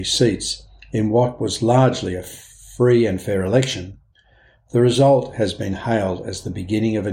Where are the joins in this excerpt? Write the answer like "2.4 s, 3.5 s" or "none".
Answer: none